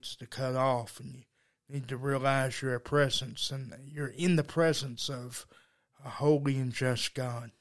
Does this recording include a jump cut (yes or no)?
no